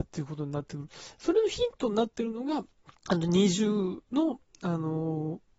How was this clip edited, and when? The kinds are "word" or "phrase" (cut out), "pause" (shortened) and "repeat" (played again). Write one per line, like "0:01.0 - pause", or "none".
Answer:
0:03.0 - pause
0:04.1 - pause